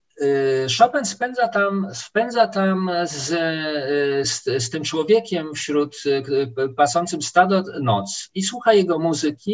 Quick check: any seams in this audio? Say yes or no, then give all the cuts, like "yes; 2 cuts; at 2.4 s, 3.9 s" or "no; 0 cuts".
yes; 1 cut; at 4.2 s